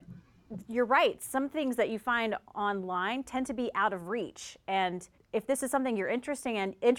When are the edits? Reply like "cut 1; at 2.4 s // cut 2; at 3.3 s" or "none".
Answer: cut 1; at 5.1 s